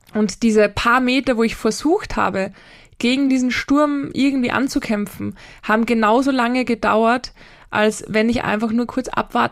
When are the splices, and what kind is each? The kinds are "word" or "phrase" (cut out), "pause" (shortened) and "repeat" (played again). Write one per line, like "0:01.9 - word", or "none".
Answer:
none

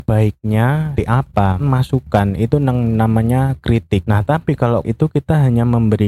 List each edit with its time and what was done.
0:01.0 - word
0:01.6 - word
0:04.8 - word

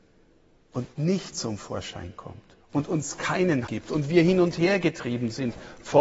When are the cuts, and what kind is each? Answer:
0:02.6 - pause
0:03.7 - word

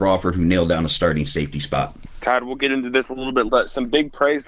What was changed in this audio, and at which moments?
0:03.5 - word

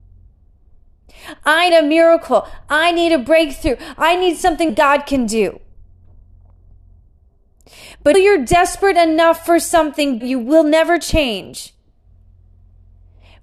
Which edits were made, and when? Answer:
0:01.7 - word
0:04.7 - word
0:08.1 - word
0:10.2 - word

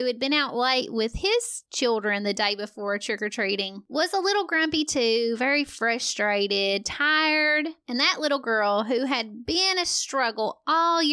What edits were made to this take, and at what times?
none

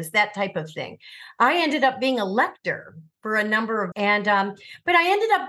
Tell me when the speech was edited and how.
0:03.9 - word

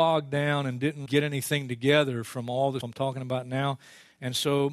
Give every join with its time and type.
0:01.1 - word
0:02.8 - word

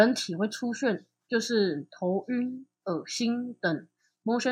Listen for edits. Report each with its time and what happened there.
0:02.7 - pause

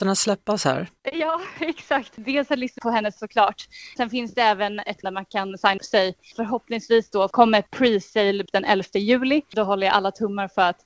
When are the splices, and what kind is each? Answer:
0:02.8 - word
0:03.2 - word
0:05.0 - word
0:05.8 - word
0:07.7 - word
0:08.5 - word

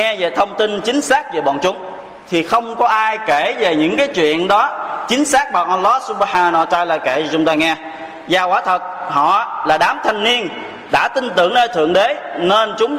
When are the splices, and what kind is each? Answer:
none

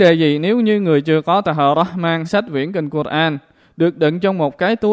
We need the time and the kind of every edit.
0:02.2 - word

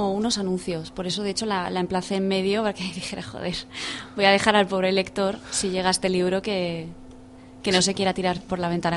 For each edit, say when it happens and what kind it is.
none

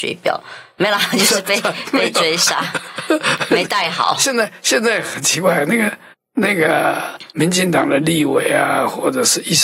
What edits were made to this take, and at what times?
0:06.1 - pause
0:07.3 - pause

